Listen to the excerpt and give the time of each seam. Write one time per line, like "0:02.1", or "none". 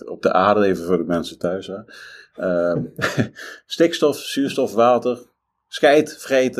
none